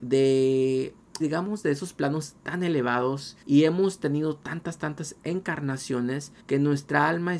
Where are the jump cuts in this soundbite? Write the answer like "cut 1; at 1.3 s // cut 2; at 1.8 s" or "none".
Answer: cut 1; at 1.2 s // cut 2; at 3.4 s // cut 3; at 6.4 s